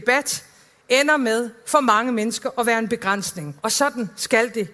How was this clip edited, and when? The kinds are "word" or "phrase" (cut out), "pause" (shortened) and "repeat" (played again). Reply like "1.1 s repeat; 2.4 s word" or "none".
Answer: 3.6 s pause

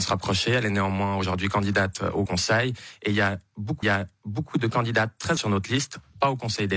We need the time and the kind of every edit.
2.3 s word; 3.8 s repeat; 5.4 s word

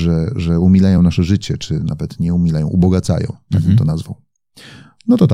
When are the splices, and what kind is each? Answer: none

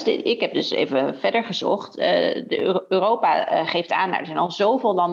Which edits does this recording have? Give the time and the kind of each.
none

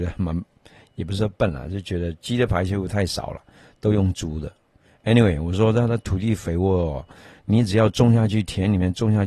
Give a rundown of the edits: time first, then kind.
none

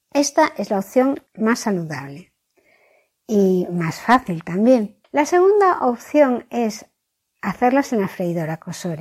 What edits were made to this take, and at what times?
1.3 s pause; 5.0 s pause

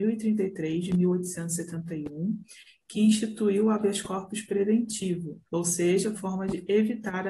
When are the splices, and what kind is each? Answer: 5.5 s pause; 6.1 s word

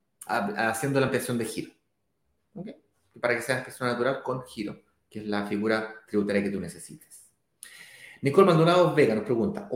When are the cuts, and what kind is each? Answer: none

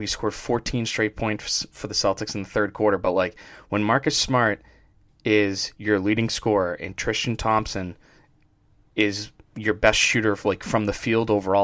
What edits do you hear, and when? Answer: none

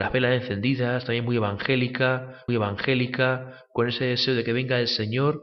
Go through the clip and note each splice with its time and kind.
2.5 s repeat

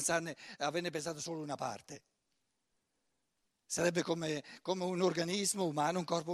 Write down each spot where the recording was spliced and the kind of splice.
none

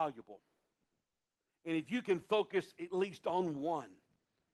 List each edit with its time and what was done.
none

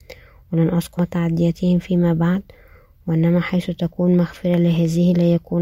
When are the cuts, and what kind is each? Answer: 1.0 s word

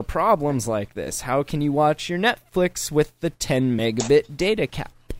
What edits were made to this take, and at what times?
none

